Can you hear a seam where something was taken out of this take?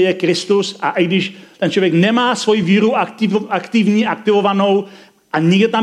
no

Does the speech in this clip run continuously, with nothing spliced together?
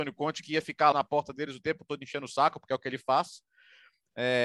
no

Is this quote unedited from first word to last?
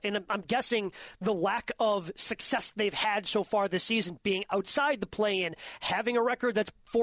yes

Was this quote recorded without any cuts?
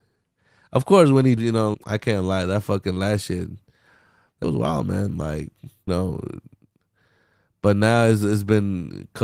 no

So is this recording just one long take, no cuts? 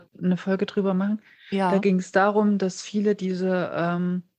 yes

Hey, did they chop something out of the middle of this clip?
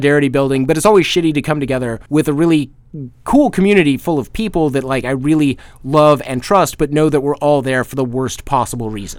yes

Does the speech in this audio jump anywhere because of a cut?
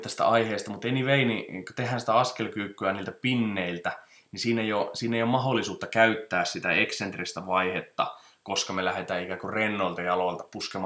no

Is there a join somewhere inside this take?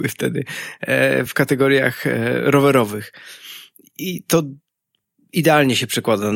no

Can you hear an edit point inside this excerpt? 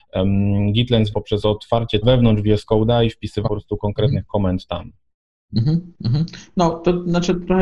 yes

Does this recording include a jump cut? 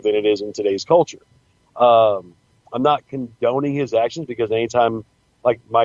no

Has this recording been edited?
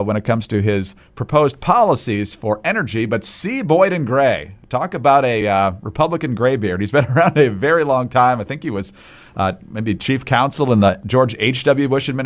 no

